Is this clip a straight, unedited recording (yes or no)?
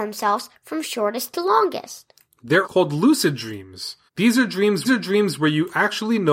no